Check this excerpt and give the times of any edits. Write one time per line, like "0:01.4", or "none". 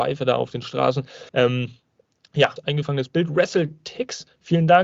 0:01.3
0:02.6